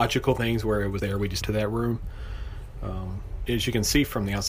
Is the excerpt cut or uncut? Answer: cut